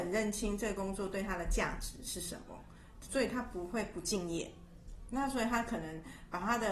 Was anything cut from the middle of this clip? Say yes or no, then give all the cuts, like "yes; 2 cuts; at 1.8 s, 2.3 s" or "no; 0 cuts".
no; 0 cuts